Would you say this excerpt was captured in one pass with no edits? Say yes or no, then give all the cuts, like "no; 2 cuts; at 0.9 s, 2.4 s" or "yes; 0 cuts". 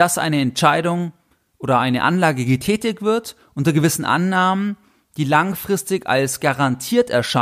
yes; 0 cuts